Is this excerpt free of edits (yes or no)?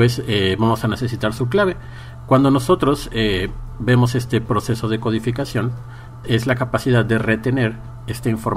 no